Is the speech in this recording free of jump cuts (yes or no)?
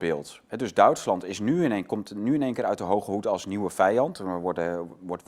yes